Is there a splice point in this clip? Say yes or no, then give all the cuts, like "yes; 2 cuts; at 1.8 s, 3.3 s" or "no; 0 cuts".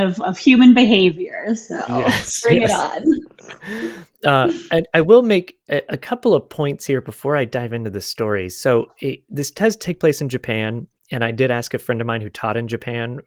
no; 0 cuts